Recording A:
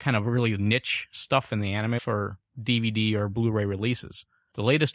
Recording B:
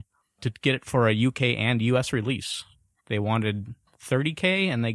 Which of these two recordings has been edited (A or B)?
A